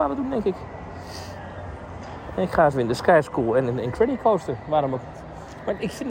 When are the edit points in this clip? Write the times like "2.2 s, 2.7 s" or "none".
2.7 s